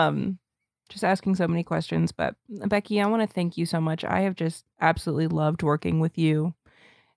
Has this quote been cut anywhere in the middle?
no; 0 cuts

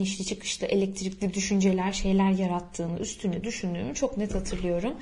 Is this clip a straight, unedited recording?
yes; 0 cuts

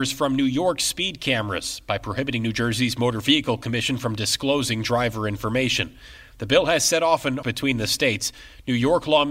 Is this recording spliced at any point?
yes; 1 cut; at 7.4 s

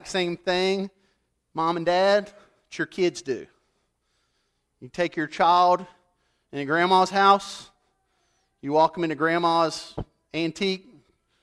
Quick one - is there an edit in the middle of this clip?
no; 0 cuts

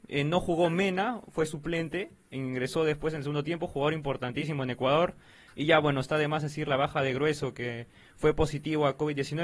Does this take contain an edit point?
no; 0 cuts

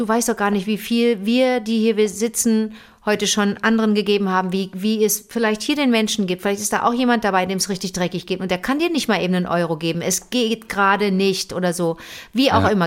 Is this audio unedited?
yes; 0 cuts

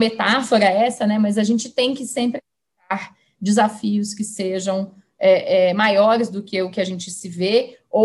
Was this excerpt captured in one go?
yes; 0 cuts

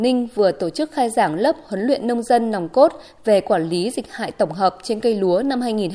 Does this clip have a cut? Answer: no; 0 cuts

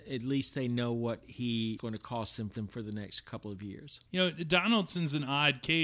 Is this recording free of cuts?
no; 2 cuts; at 1.8 s, 2.6 s

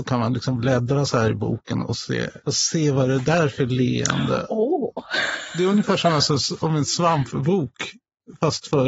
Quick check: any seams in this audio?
yes; 1 cut; at 2.4 s

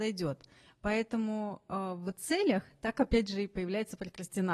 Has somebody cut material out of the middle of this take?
no; 0 cuts

